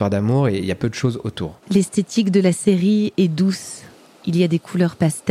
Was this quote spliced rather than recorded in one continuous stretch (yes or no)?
yes